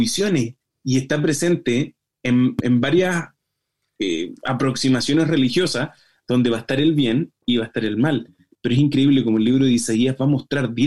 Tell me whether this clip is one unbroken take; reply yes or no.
yes